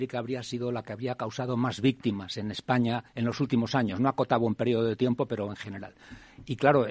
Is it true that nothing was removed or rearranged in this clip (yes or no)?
no